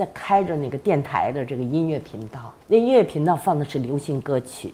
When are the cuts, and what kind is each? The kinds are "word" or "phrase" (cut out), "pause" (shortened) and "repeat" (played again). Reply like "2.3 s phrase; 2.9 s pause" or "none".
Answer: 2.6 s pause